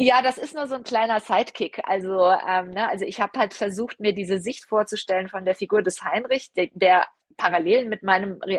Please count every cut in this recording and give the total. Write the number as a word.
zero